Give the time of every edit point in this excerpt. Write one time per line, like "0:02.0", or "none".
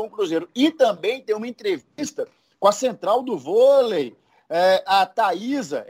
none